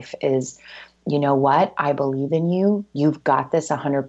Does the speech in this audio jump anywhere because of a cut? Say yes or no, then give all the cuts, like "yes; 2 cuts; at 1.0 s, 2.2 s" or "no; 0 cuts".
no; 0 cuts